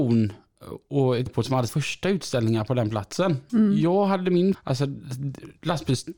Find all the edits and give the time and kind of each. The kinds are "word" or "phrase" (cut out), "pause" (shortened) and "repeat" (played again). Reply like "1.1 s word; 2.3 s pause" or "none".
1.3 s word; 1.7 s word; 4.5 s word